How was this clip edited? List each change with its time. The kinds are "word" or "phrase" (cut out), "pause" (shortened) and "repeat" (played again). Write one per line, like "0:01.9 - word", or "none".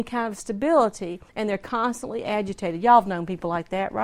0:01.3 - pause

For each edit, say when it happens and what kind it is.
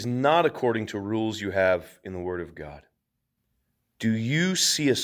0:03.4 - pause

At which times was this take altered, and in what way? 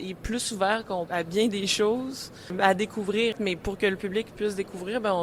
0:01.1 - word

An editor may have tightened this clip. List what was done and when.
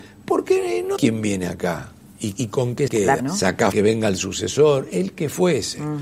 0:01.0 - word
0:02.4 - word
0:02.9 - word
0:03.2 - word
0:03.7 - word

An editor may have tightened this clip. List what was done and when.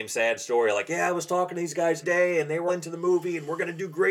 0:02.0 - word
0:02.7 - word

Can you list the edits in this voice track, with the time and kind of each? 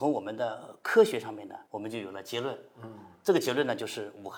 0:01.7 - pause

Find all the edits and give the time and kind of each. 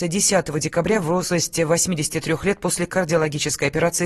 none

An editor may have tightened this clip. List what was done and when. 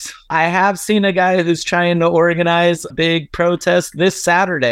0:02.9 - word

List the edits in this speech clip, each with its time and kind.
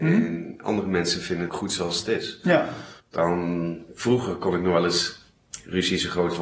0:01.5 - word
0:03.0 - pause

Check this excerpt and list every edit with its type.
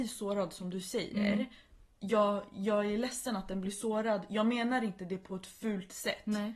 none

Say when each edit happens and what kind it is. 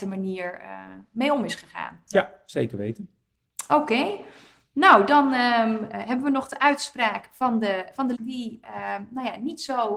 0:05.9 - word
0:08.1 - word

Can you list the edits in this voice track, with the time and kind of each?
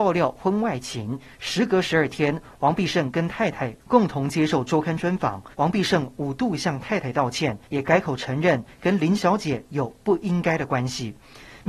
0:05.5 - pause
0:07.7 - pause

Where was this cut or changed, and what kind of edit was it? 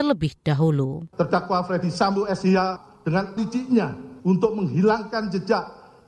0:01.1 - pause
0:03.4 - word
0:04.2 - pause

